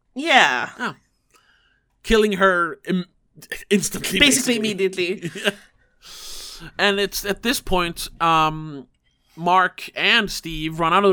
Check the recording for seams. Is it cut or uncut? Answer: uncut